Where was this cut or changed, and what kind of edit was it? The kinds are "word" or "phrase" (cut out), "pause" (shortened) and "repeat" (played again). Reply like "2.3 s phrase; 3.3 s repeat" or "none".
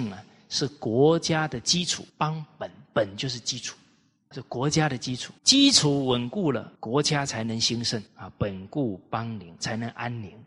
2.1 s pause; 4.3 s word; 5.4 s pause; 6.8 s pause; 8.1 s pause; 9.6 s word